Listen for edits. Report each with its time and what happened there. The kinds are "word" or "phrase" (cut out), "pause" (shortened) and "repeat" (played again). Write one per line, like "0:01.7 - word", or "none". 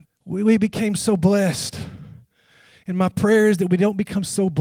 none